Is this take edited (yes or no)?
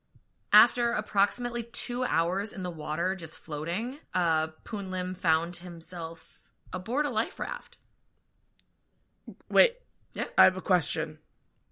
yes